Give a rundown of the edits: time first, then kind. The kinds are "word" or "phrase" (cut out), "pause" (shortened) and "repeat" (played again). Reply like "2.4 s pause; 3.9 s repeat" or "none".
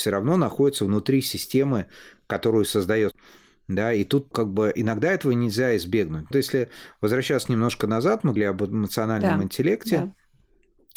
3.1 s word; 4.3 s word; 6.3 s word; 8.4 s word